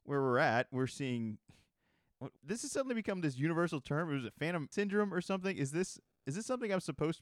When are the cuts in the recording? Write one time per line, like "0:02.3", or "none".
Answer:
0:02.4
0:04.7